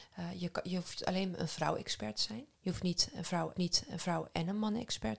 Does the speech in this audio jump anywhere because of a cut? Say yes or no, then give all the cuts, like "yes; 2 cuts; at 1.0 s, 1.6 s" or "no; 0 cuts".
yes; 2 cuts; at 2.5 s, 3.6 s